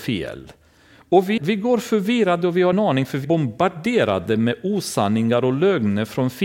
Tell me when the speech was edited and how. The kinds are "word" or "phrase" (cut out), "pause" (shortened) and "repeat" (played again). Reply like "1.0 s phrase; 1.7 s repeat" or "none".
1.4 s word; 2.7 s word; 3.2 s word

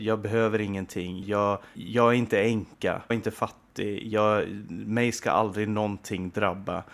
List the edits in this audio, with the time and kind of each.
1.2 s word; 1.7 s word; 3.1 s word

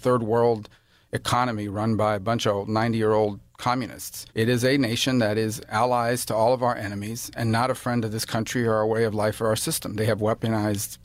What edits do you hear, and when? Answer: 4.3 s pause

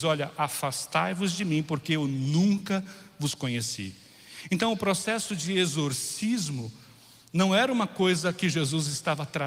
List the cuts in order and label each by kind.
none

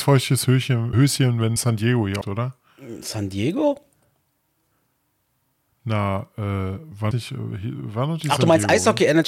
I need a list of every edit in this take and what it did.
0.9 s word; 1.6 s word; 2.2 s word; 7.1 s word

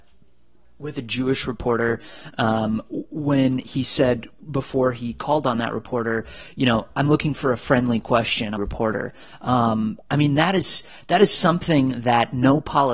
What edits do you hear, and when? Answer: 8.6 s phrase

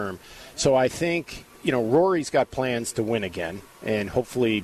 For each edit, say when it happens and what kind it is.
1.5 s pause

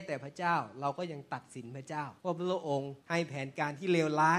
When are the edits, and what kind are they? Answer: 2.2 s pause; 3.0 s pause

